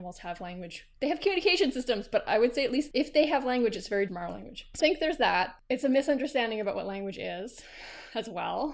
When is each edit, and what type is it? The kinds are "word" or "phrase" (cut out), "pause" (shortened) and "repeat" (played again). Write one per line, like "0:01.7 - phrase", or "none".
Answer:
0:04.1 - word
0:04.8 - word